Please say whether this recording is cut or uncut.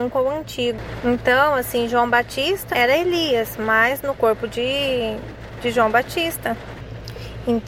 cut